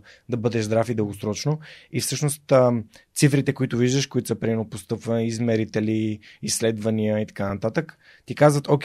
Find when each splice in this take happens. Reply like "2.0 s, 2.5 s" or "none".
none